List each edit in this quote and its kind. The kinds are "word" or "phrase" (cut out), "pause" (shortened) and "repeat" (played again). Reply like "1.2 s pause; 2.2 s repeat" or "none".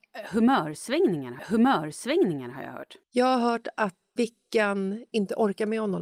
1.4 s repeat; 3.0 s pause; 4.2 s word